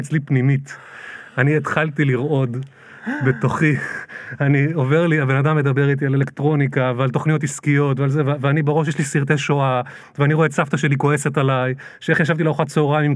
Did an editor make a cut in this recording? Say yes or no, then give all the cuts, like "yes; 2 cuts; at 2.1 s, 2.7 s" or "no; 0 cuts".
no; 0 cuts